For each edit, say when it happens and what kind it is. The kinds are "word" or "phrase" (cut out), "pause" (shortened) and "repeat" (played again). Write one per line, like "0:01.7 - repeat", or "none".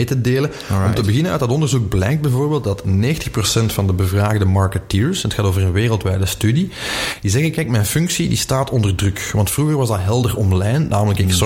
none